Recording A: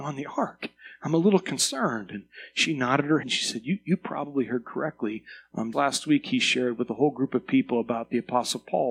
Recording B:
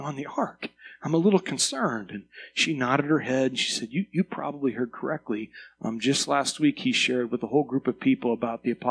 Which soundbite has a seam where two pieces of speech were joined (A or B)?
A